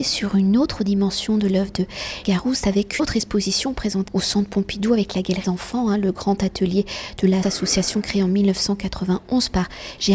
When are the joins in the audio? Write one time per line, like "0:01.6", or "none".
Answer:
0:02.2
0:03.0
0:04.1
0:05.4
0:07.4